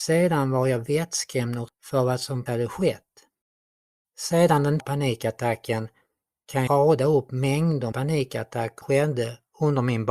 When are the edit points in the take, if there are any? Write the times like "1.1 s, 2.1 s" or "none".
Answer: 1.7 s, 2.5 s, 4.8 s, 6.7 s, 7.9 s, 8.8 s